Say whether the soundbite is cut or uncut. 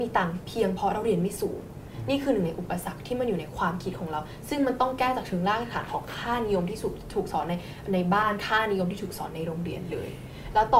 uncut